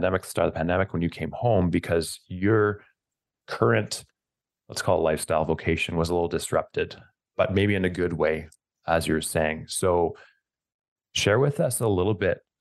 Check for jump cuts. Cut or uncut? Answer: uncut